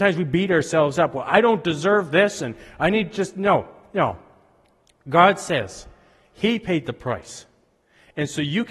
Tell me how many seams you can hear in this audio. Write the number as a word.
zero